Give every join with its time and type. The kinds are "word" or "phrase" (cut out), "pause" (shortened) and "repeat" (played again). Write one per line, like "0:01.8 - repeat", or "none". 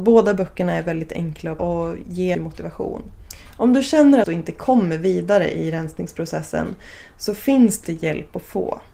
0:01.6 - word
0:02.3 - word
0:04.2 - phrase

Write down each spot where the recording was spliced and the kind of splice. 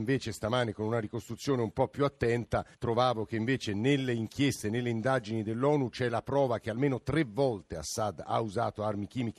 0:02.7 - pause

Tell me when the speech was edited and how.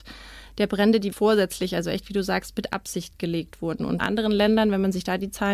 0:01.1 - word
0:04.0 - word

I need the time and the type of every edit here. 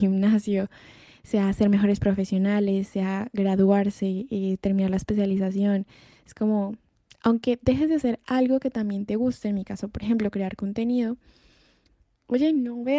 none

